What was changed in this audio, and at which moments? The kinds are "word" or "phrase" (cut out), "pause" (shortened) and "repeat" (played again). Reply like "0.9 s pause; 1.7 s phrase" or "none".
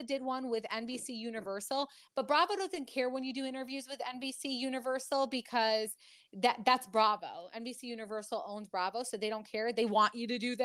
none